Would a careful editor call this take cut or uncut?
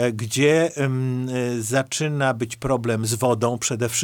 uncut